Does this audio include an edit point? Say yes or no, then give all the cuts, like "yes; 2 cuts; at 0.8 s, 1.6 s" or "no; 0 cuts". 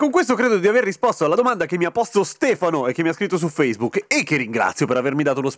no; 0 cuts